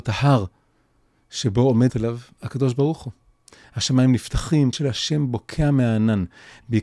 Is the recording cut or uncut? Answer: cut